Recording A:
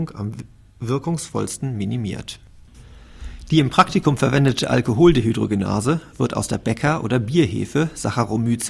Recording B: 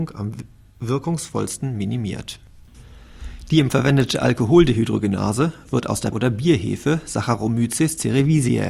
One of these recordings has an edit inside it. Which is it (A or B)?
B